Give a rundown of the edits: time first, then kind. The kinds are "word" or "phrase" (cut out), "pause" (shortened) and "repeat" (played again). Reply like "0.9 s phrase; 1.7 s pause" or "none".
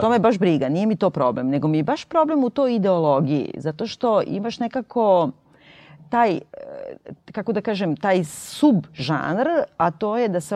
none